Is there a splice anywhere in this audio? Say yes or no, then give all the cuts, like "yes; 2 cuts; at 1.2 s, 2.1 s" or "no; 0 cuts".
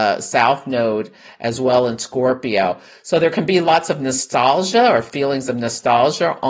no; 0 cuts